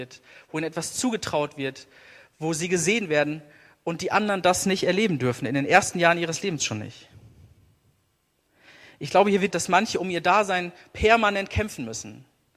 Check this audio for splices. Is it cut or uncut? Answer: cut